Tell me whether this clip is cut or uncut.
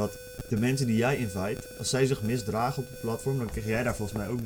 uncut